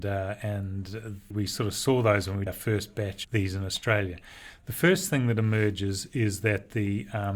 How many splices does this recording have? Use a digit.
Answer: 3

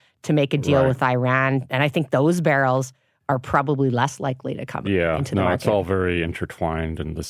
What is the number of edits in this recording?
0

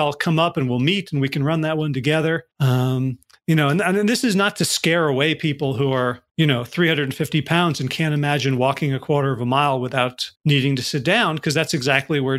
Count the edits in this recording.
3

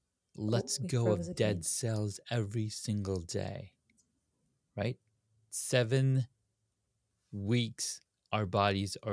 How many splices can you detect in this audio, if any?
0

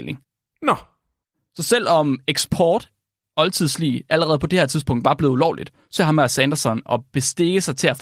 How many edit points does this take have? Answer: 2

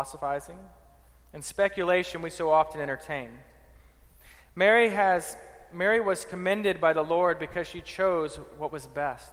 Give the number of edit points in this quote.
0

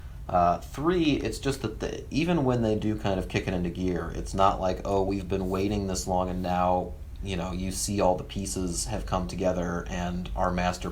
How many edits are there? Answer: 0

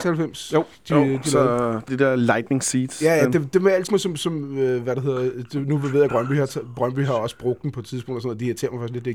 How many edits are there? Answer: 3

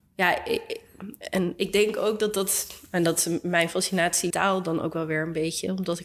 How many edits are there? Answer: 1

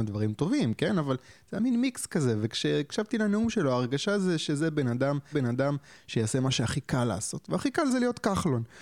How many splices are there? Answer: 1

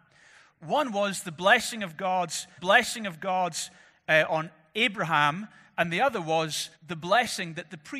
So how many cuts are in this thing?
2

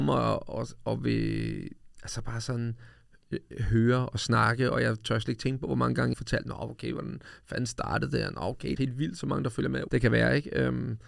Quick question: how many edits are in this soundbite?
3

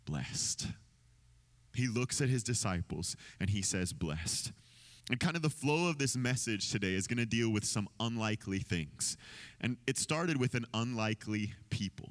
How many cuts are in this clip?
1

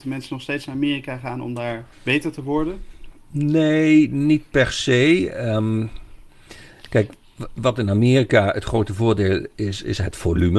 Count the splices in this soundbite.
1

